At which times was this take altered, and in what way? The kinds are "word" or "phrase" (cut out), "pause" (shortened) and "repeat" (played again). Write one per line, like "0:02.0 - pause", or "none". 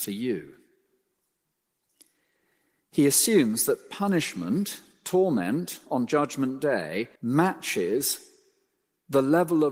0:07.2 - pause